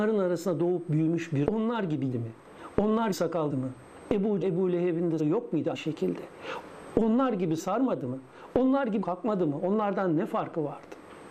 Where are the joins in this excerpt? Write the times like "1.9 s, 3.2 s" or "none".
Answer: 1.4 s, 2.1 s, 3.1 s, 3.5 s, 4.4 s, 5.2 s, 5.7 s, 7.6 s, 9.0 s